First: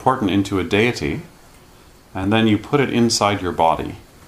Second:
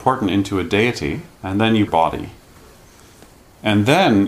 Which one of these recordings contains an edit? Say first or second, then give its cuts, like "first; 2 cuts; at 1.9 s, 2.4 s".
second; 2 cuts; at 1.3 s, 1.9 s